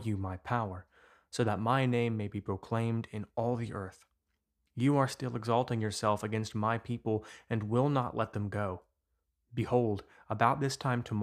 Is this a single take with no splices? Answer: yes; 0 cuts

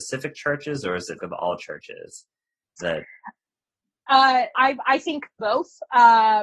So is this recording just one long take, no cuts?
no; 4 cuts; at 1.2 s, 4.1 s, 4.5 s, 5.4 s

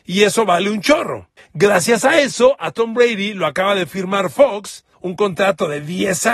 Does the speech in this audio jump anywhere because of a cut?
yes; 2 cuts; at 1.4 s, 4.9 s

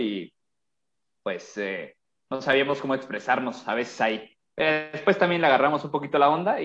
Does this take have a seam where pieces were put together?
no; 0 cuts

